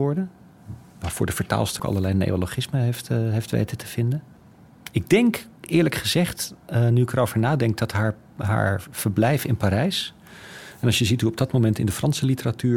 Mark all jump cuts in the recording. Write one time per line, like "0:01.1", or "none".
0:01.8

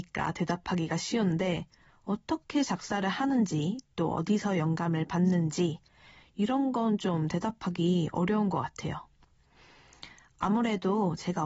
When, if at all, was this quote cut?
none

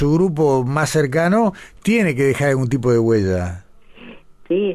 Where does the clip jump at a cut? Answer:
none

